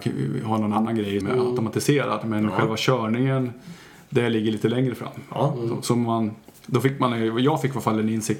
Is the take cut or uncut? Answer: cut